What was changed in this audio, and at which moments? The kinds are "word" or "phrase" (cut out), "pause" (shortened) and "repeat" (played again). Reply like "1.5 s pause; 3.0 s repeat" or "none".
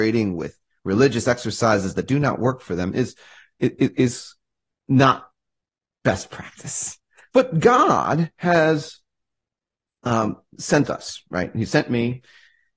none